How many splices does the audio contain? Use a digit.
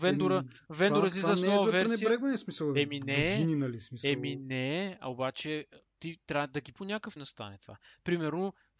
2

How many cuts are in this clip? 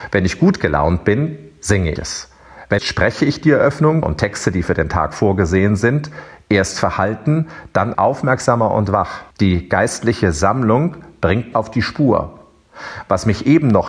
6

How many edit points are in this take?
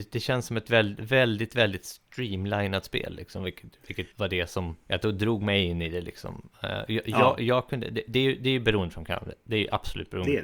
2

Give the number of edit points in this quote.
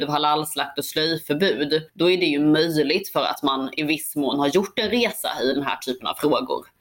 1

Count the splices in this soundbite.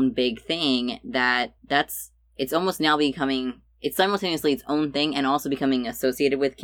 1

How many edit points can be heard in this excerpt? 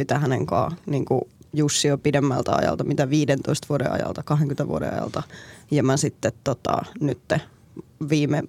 0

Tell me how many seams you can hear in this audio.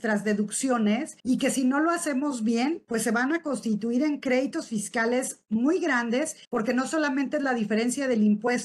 2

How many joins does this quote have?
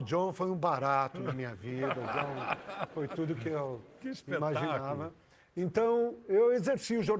0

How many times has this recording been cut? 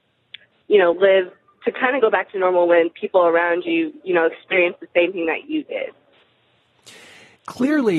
0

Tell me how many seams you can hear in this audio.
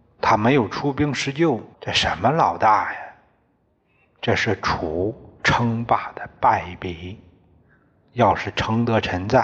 1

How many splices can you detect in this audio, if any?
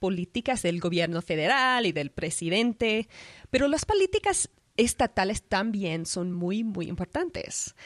0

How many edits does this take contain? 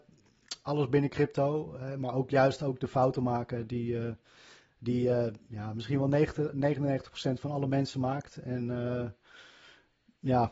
0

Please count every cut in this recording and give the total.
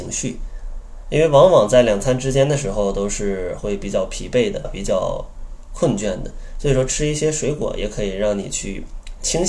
1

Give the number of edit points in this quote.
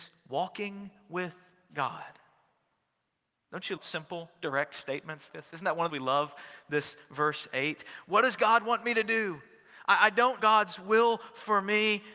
4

